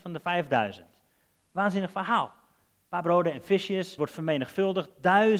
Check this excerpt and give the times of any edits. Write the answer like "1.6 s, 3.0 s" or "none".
4.0 s